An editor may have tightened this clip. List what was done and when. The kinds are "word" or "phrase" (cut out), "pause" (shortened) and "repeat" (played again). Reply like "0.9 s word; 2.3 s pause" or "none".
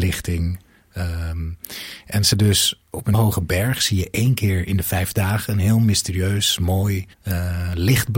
2.3 s word; 3.1 s word; 7.1 s pause